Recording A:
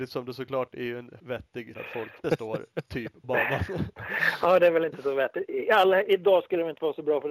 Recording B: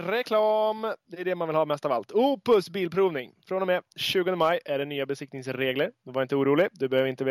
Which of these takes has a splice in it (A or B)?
A